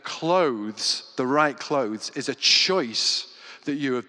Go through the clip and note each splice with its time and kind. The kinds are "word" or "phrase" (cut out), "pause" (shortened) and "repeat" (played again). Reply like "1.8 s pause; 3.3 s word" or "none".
none